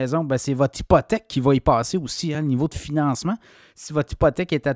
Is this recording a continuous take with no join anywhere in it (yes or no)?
yes